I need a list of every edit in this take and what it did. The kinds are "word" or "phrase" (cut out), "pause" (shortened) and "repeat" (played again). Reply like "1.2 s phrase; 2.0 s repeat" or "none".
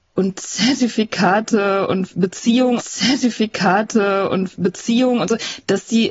2.8 s repeat